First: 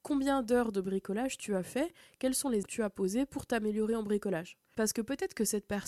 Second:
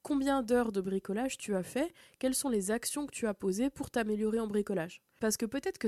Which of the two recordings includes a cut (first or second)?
first